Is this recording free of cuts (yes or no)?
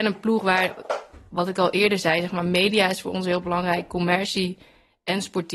yes